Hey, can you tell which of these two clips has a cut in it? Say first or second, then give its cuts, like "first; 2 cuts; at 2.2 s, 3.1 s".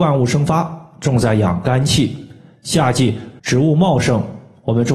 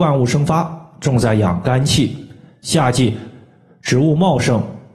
first; 1 cut; at 3.4 s